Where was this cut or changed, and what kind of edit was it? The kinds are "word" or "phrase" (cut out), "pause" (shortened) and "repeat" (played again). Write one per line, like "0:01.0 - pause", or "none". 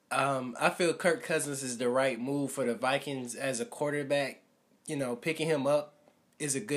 none